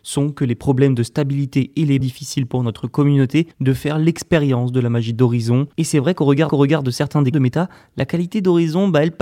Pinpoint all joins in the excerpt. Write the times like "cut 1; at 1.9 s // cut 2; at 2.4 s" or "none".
cut 1; at 2.0 s // cut 2; at 3.5 s // cut 3; at 5.7 s // cut 4; at 6.5 s // cut 5; at 7.3 s